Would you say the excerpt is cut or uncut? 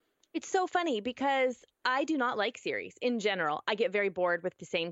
cut